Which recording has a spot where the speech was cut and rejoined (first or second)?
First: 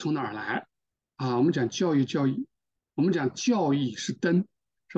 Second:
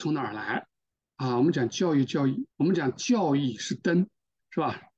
second